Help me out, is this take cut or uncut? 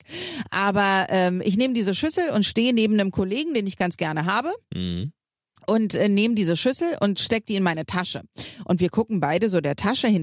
uncut